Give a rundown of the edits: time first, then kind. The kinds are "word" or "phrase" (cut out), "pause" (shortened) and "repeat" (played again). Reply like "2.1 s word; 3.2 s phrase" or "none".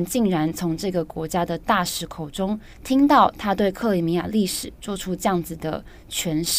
2.7 s pause

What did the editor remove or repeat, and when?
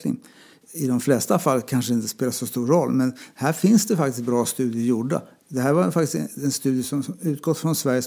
none

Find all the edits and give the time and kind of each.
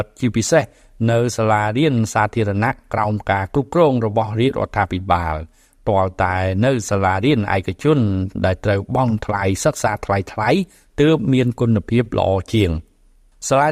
none

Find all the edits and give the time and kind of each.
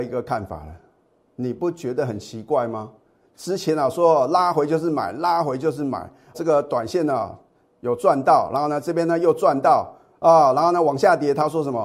6.3 s word

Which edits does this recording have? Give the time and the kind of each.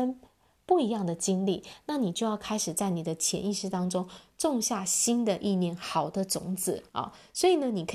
6.9 s pause

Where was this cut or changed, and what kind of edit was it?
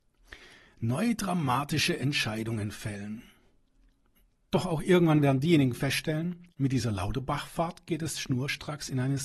6.5 s pause

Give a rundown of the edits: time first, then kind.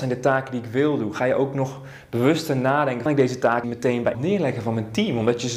3.1 s phrase; 3.6 s word; 4.1 s word

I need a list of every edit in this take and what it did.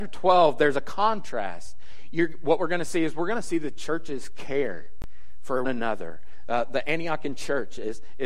5.6 s word

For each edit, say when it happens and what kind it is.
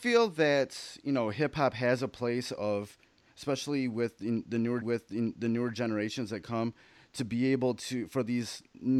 4.8 s repeat

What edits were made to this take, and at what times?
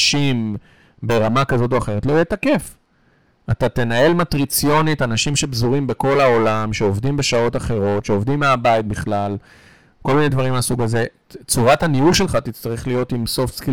none

